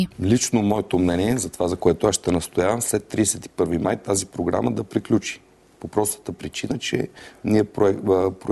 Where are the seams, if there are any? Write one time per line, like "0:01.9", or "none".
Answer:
none